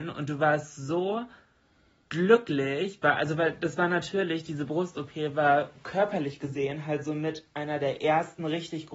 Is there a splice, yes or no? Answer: no